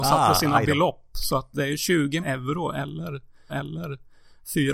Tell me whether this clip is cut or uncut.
cut